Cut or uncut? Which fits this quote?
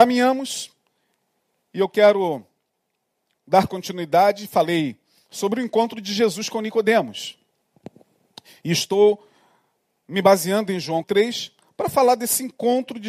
cut